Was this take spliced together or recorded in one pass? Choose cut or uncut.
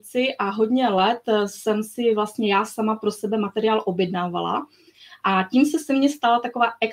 uncut